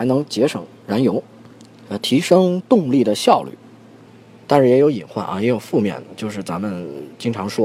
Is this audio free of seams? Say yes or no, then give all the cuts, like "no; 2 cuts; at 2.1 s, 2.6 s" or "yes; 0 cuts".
yes; 0 cuts